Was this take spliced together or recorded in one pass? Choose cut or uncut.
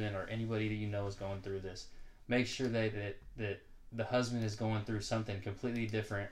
uncut